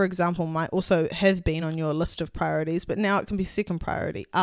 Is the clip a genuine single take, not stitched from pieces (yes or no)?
yes